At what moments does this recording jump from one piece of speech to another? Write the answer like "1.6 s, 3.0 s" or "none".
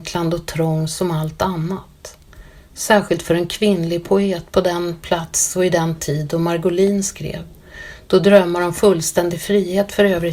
none